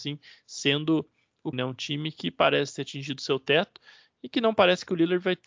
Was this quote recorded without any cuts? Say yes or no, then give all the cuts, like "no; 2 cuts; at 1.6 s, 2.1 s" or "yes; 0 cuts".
no; 1 cut; at 1.5 s